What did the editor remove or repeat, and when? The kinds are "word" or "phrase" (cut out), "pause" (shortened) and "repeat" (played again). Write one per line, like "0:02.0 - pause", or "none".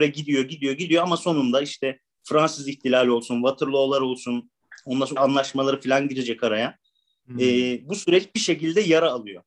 0:05.2 - word